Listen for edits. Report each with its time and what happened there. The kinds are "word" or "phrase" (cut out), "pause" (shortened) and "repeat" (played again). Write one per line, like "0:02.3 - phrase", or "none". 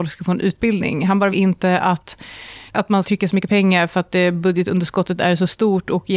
0:01.3 - word
0:02.7 - word
0:03.0 - word

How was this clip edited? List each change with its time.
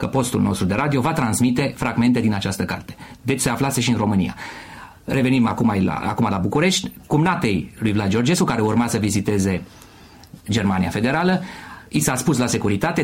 0:11.9 - pause

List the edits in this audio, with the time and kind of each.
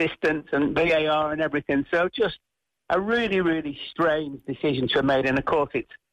none

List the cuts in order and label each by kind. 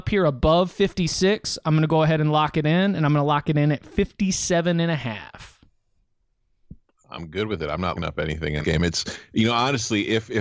0:06.8 - pause
0:08.0 - word
0:08.6 - word

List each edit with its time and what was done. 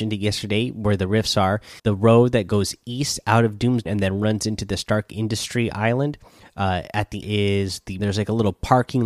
0:01.8 - pause
0:03.9 - word
0:06.4 - pause
0:07.2 - phrase
0:08.0 - phrase

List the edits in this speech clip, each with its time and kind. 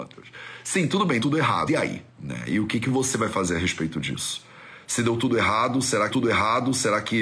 0:01.2 - word
0:01.7 - word
0:02.1 - pause
0:06.1 - repeat

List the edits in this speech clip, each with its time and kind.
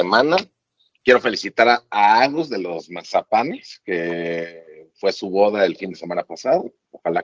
none

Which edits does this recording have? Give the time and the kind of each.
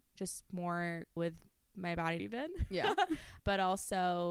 0:01.2 - word
0:02.2 - phrase
0:03.4 - word

